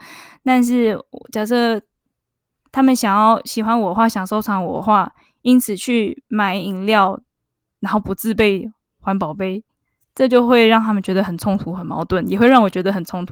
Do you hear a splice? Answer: no; 0 cuts

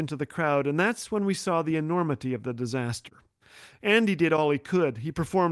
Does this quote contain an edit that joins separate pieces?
no; 0 cuts

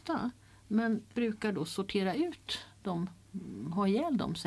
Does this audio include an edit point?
yes; 1 cut; at 1.2 s

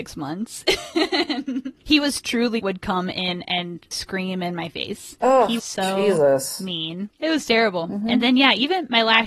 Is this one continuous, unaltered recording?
no; 3 cuts; at 2.6 s, 3.9 s, 5.6 s

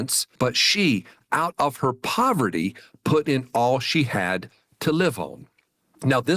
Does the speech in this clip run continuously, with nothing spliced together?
yes; 0 cuts

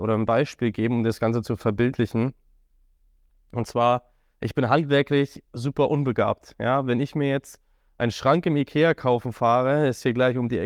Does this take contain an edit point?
no; 0 cuts

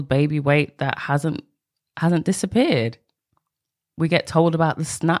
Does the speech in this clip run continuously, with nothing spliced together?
yes; 0 cuts

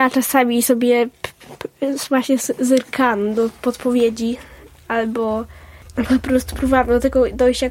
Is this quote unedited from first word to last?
yes; 0 cuts

